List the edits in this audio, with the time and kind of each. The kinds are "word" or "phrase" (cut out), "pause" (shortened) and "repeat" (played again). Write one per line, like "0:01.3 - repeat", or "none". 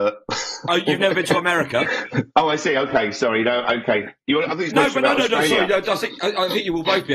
0:04.7 - word